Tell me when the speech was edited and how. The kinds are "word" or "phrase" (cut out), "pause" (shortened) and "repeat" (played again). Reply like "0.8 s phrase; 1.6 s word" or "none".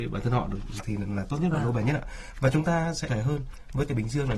3.1 s phrase